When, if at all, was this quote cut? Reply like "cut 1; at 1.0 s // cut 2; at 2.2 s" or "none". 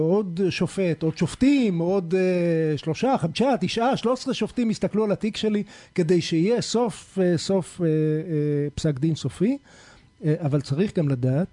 none